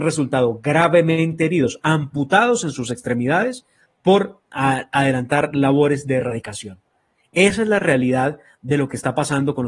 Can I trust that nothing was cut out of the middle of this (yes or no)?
yes